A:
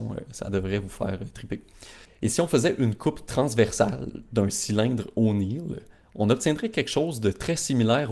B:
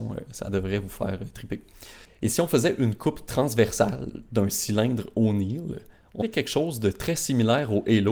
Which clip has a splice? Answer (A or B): B